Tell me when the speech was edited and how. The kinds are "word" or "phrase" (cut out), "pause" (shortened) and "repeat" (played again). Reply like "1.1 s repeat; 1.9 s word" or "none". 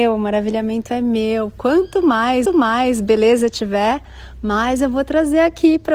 2.5 s repeat